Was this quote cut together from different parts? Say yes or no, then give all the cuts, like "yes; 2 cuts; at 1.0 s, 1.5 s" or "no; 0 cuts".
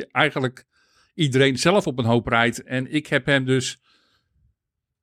no; 0 cuts